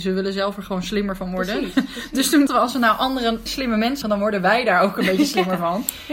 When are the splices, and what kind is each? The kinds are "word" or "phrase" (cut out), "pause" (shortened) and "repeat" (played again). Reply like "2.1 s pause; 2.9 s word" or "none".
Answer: 2.5 s word; 3.5 s word; 4.0 s word